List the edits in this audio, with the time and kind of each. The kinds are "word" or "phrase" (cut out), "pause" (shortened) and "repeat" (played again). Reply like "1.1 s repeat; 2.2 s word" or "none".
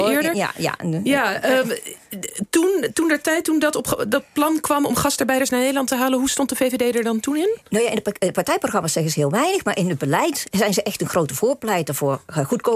none